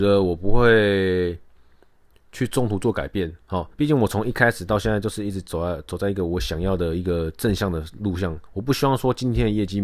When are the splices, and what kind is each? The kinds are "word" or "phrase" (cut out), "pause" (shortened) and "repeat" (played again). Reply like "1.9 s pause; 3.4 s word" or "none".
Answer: 3.7 s pause; 8.5 s pause